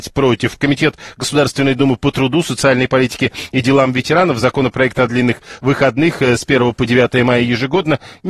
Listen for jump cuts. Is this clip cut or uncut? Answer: uncut